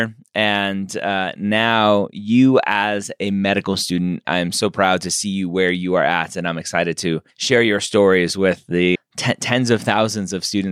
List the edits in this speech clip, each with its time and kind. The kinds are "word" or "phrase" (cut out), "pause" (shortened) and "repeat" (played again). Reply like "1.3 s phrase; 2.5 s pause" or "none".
4.2 s word; 7.3 s pause; 9.0 s word